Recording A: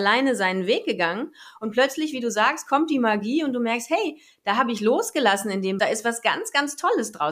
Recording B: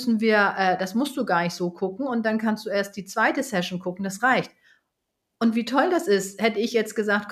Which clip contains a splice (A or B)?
A